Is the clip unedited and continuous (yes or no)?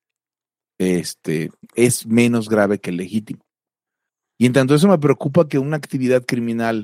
yes